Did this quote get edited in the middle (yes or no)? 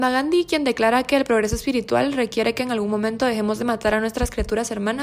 no